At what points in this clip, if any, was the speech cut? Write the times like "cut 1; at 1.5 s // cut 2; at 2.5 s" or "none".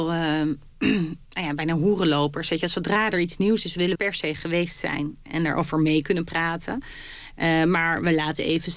cut 1; at 4.0 s